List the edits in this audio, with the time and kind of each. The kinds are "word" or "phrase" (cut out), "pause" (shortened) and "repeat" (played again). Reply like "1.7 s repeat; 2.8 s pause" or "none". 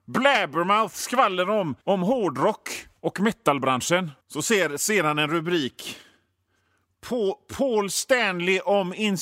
1.8 s pause; 3.0 s pause; 4.2 s pause